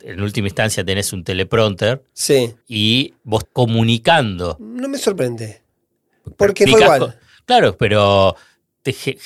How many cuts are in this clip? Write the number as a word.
four